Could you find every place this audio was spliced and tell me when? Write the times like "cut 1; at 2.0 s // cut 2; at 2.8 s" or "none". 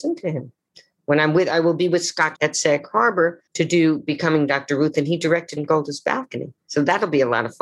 cut 1; at 2.3 s // cut 2; at 3.5 s // cut 3; at 5.6 s